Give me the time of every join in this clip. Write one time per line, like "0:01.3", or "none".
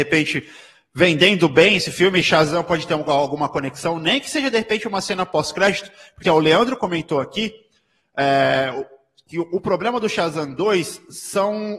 0:06.2